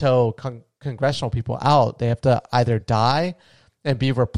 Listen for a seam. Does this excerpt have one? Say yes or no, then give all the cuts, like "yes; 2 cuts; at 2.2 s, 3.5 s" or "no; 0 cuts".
no; 0 cuts